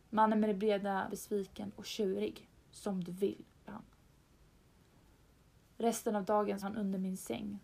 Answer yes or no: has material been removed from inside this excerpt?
yes